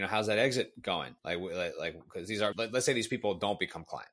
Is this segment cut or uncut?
cut